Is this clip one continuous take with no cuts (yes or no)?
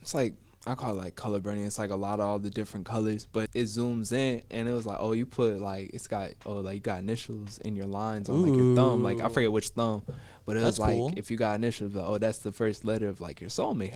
no